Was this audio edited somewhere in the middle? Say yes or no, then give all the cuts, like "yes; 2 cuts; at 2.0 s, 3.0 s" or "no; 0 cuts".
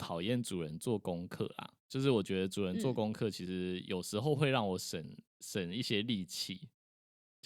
yes; 1 cut; at 5.3 s